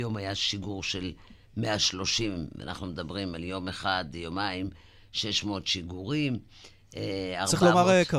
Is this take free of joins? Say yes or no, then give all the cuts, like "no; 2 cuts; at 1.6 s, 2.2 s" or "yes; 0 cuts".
yes; 0 cuts